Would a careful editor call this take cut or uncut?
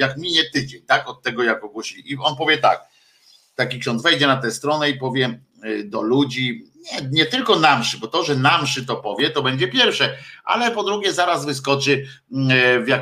uncut